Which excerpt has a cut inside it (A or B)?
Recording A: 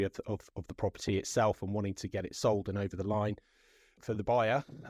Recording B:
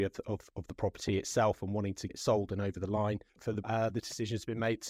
B